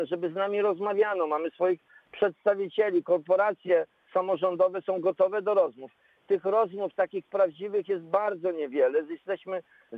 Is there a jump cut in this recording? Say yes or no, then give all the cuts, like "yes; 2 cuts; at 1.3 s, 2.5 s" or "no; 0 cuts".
no; 0 cuts